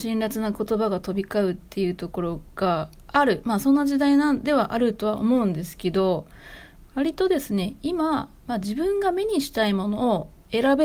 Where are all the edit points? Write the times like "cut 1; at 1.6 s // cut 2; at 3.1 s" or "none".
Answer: cut 1; at 8.4 s